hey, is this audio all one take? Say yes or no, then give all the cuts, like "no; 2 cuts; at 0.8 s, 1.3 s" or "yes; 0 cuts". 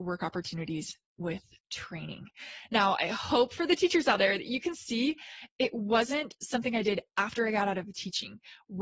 yes; 0 cuts